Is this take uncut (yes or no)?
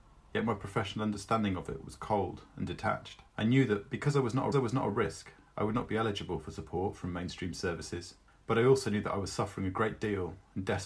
no